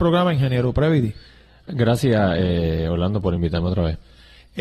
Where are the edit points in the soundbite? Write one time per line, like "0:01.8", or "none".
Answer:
none